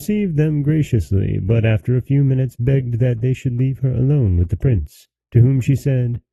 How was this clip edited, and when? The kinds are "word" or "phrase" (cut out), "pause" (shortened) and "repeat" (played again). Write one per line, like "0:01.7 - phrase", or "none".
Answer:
none